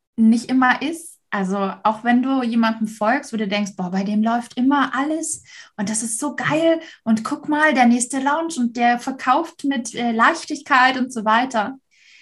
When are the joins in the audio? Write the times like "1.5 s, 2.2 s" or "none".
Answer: none